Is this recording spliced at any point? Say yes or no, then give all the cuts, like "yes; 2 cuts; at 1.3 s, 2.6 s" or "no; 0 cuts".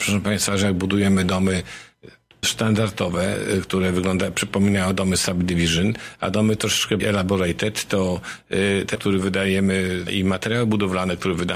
yes; 4 cuts; at 2.4 s, 7.0 s, 8.9 s, 10.1 s